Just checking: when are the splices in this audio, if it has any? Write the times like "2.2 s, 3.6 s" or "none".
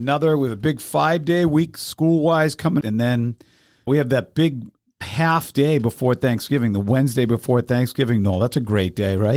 2.8 s, 3.9 s, 5.0 s